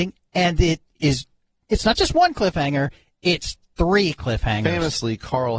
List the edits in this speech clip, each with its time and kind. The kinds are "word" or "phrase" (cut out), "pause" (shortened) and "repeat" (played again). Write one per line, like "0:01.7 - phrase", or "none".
none